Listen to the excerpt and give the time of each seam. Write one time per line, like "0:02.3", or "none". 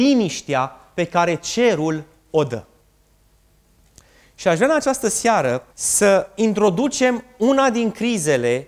0:05.7

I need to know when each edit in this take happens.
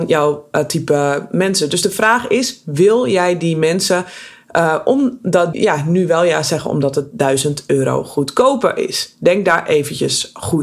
0:05.5

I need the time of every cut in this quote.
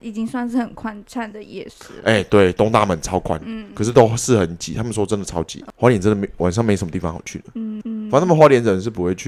0:07.8

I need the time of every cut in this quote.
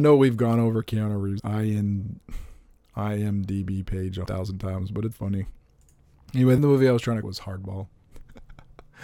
0:01.4
0:04.3
0:05.1
0:06.6
0:07.2

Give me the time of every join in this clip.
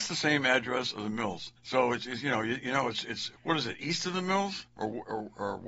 0:01.6
0:03.4
0:04.7

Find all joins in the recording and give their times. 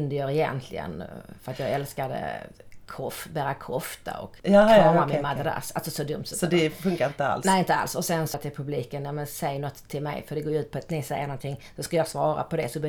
0:04.4
0:08.3

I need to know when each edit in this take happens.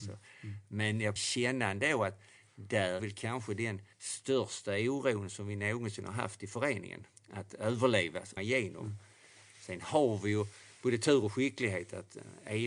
0:01.2
0:03.0
0:03.9
0:07.2
0:08.4

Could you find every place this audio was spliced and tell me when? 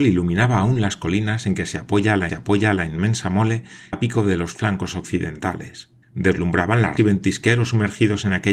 0:02.3
0:03.9
0:06.0
0:07.0

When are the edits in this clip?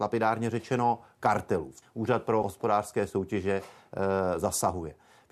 0:01.8
0:02.4

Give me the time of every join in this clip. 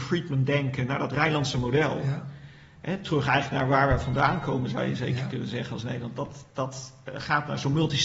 none

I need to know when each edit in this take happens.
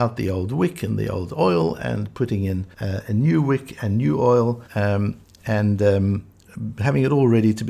0:02.7
0:04.7

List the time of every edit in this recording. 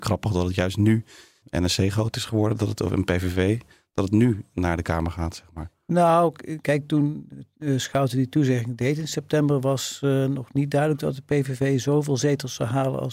none

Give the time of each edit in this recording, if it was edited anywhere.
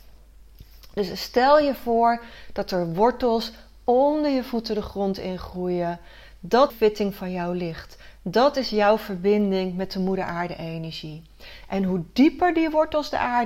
0:06.7

